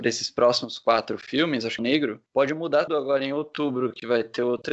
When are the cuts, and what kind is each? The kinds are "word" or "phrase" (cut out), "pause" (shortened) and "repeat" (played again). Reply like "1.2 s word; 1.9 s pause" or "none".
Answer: 1.8 s phrase; 2.3 s pause; 2.9 s word